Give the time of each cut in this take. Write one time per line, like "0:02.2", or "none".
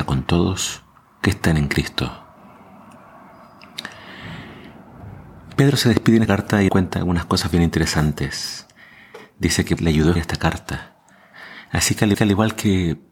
0:00.9
0:06.3
0:06.7
0:09.8
0:10.2
0:12.1

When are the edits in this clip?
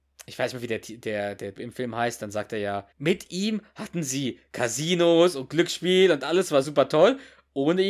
0:01.6
0:02.9
0:06.6

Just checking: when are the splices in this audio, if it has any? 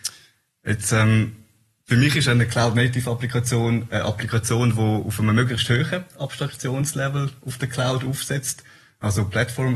none

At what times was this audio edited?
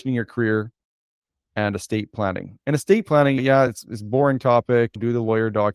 none

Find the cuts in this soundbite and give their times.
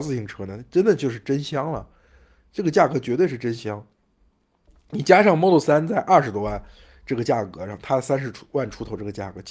none

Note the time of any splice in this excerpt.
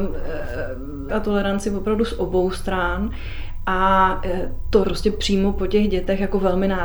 0:01.1
0:04.8

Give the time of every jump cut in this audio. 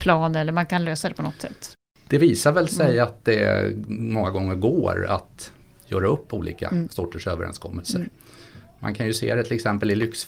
none

